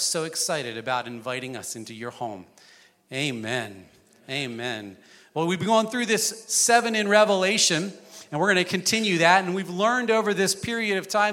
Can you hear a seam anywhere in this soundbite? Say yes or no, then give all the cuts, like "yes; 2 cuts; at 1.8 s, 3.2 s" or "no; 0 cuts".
no; 0 cuts